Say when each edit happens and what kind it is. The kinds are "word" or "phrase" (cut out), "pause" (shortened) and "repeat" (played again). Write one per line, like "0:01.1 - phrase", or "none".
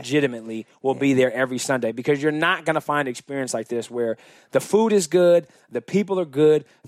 none